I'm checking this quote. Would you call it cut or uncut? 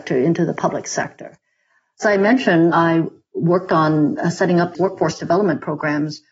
cut